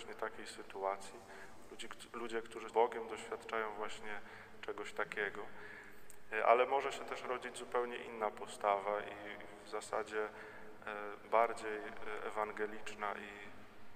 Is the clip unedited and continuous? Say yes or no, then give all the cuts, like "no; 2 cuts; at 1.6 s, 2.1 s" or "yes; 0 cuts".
no; 1 cut; at 2.7 s